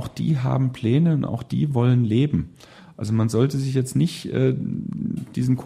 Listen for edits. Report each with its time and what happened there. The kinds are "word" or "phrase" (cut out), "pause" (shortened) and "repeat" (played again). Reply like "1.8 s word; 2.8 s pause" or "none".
none